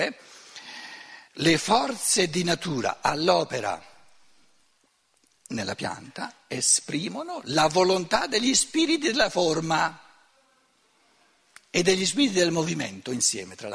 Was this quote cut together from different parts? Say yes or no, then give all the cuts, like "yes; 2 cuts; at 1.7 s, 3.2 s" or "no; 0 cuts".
no; 0 cuts